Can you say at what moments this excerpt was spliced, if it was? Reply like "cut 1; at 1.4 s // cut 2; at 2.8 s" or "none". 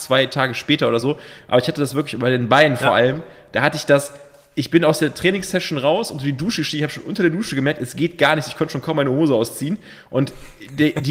none